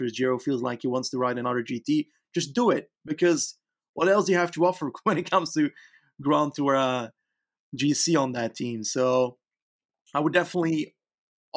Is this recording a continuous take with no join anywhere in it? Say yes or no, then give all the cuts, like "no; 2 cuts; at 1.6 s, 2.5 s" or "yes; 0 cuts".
yes; 0 cuts